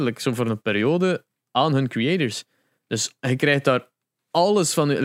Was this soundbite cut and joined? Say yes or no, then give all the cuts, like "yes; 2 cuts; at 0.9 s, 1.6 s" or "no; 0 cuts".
no; 0 cuts